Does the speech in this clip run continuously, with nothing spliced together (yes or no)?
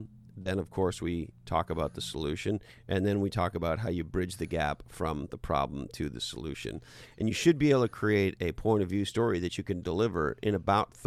yes